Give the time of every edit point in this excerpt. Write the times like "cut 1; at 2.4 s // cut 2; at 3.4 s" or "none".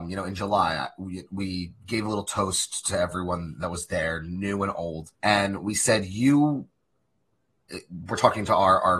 cut 1; at 5.1 s